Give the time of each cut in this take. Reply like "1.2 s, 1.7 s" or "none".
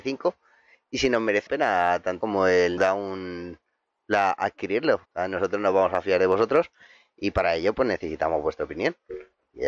1.5 s, 2.2 s, 2.8 s, 5.0 s